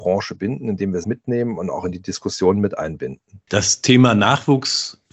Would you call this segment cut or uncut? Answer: cut